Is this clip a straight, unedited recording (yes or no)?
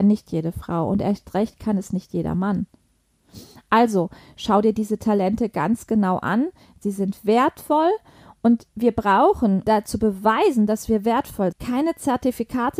no